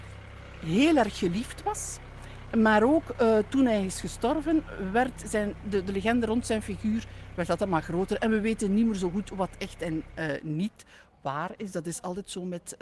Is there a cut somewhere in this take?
no; 0 cuts

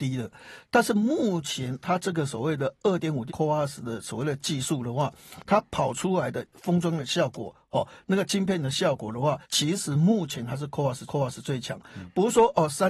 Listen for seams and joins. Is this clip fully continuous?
no; 3 cuts; at 3.3 s, 9.4 s, 11.1 s

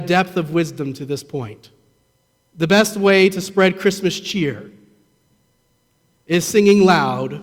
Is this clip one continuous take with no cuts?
no; 1 cut; at 2.2 s

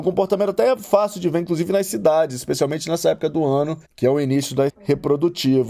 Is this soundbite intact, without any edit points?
no; 2 cuts; at 3.8 s, 4.7 s

